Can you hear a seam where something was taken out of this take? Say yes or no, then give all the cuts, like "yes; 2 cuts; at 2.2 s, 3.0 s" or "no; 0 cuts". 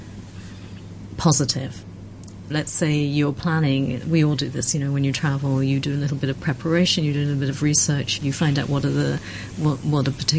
yes; 2 cuts; at 2.5 s, 8.2 s